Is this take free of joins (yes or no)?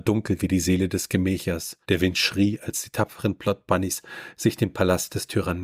no